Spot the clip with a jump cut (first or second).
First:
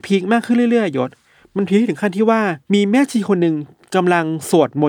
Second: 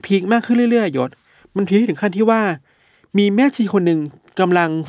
first